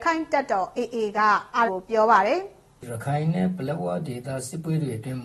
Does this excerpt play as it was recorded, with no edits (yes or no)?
no